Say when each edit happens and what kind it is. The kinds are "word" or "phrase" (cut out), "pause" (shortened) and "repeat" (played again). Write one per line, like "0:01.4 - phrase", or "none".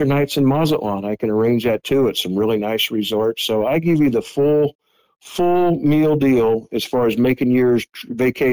none